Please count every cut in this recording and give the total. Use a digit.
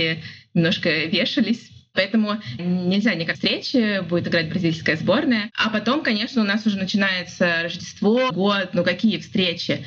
3